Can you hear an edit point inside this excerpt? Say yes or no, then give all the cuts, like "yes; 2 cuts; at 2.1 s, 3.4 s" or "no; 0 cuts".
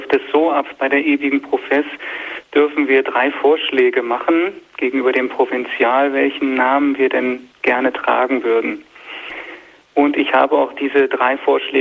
no; 0 cuts